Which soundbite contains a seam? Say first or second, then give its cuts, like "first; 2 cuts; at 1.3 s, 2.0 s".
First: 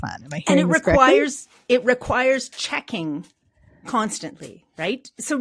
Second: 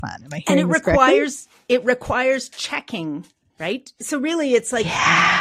second; 1 cut; at 3.5 s